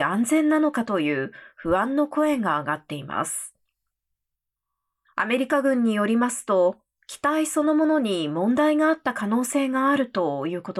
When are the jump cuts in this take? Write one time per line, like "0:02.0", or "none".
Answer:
none